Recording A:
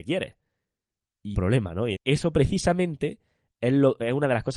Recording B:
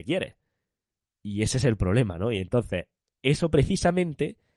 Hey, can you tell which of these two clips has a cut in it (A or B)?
A